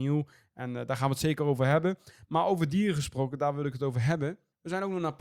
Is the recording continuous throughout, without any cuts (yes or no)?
yes